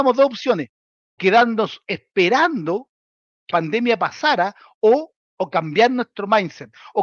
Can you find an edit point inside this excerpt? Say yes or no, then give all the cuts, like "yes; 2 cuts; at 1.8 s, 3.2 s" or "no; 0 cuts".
yes; 3 cuts; at 1.2 s, 3.5 s, 5.2 s